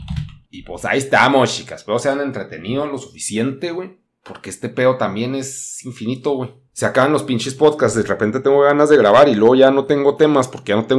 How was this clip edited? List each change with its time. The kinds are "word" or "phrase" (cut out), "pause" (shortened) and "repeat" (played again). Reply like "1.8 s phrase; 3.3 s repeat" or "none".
6.7 s pause

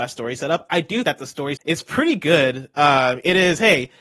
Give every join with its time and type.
1.0 s word; 1.6 s word

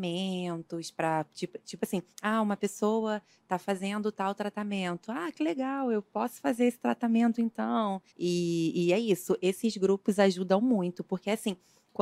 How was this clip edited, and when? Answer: 2.1 s pause; 8.1 s pause

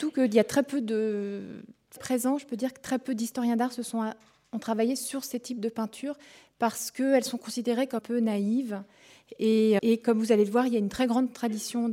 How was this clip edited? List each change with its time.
2.0 s word; 8.0 s word; 9.8 s word

